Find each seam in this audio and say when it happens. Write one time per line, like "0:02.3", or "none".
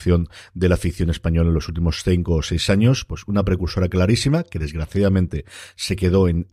none